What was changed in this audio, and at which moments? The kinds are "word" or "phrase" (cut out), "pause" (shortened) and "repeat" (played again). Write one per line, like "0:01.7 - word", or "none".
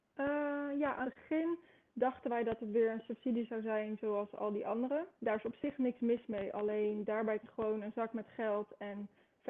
0:01.0 - word
0:05.1 - pause
0:07.4 - word